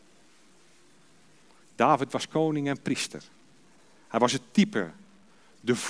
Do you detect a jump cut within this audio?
no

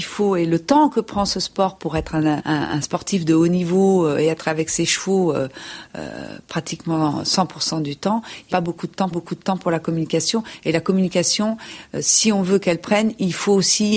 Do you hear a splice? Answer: yes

